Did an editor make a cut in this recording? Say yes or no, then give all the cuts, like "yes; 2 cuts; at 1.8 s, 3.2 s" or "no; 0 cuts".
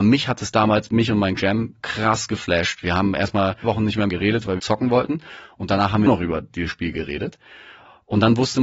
yes; 6 cuts; at 1.4 s, 1.8 s, 3.6 s, 4.1 s, 4.6 s, 6.1 s